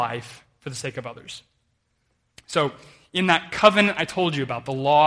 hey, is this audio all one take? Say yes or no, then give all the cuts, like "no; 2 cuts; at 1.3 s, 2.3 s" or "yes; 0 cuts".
yes; 0 cuts